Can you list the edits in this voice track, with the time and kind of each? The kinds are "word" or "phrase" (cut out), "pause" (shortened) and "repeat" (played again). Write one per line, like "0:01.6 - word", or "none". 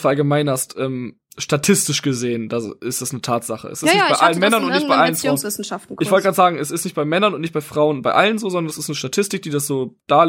none